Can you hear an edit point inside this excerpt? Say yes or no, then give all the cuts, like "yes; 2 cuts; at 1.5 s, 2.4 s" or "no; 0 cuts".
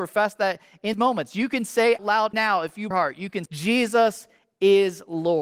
yes; 5 cuts; at 0.9 s, 2.0 s, 2.3 s, 2.9 s, 3.5 s